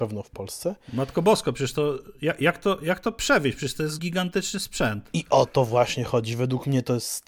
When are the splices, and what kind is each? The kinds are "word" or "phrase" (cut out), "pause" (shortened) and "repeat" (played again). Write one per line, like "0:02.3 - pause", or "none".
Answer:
0:04.0 - word